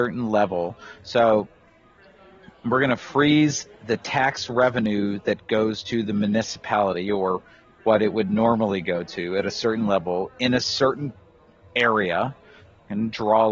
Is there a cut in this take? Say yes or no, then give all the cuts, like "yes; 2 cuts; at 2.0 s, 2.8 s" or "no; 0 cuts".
no; 0 cuts